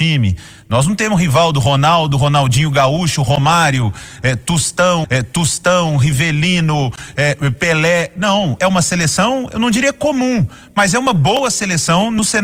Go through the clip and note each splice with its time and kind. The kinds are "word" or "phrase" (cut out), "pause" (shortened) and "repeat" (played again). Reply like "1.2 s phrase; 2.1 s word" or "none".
5.0 s repeat; 8.6 s phrase